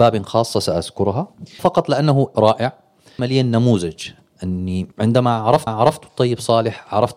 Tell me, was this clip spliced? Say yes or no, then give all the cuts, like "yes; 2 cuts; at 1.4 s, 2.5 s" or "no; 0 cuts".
yes; 5 cuts; at 1.6 s, 2.3 s, 3.2 s, 4.9 s, 5.7 s